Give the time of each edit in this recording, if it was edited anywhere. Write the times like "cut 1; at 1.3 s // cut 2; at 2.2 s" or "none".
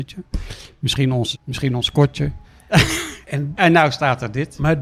cut 1; at 1.3 s // cut 2; at 2.4 s